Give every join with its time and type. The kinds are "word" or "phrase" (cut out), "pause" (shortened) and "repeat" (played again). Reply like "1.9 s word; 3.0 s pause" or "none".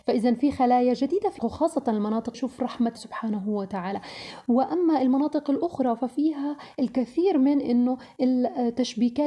1.4 s word; 2.3 s word; 3.0 s word